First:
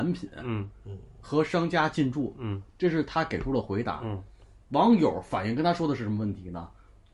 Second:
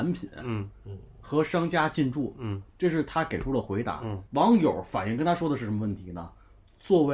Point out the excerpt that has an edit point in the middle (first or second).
second